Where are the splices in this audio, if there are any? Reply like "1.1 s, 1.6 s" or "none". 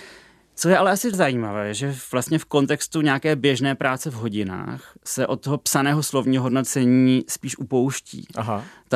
1.1 s